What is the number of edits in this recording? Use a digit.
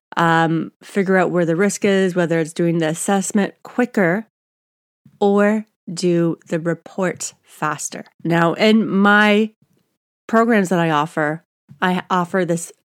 2